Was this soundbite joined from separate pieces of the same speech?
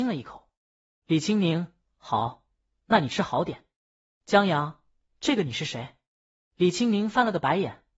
no; 0 cuts

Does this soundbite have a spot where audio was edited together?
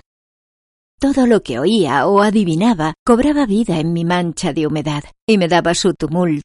no; 0 cuts

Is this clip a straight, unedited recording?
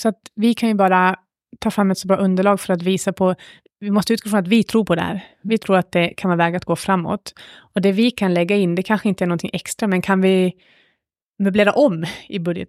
yes; 0 cuts

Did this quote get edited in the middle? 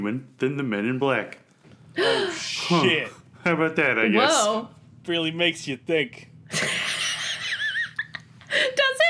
no; 0 cuts

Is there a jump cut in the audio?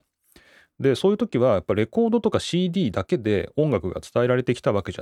no; 0 cuts

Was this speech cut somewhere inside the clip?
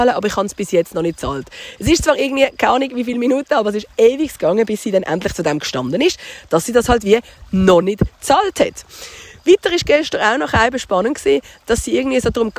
no; 0 cuts

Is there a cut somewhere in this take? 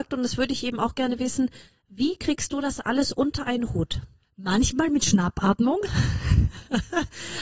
no; 0 cuts

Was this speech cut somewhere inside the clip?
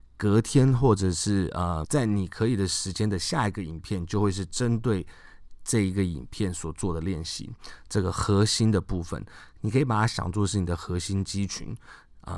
yes; 1 cut; at 1.8 s

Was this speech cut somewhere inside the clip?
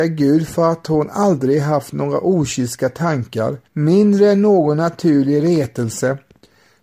yes; 1 cut; at 3.7 s

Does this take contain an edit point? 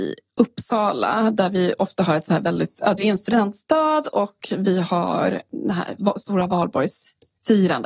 no; 0 cuts

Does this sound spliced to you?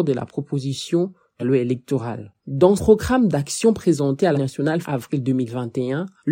yes; 4 cuts; at 1.4 s, 2.8 s, 4.3 s, 4.8 s

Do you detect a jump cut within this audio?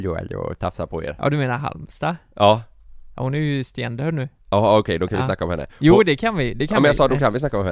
no; 0 cuts

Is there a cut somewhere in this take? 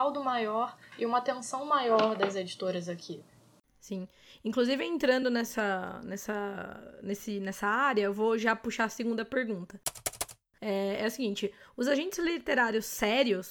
no; 0 cuts

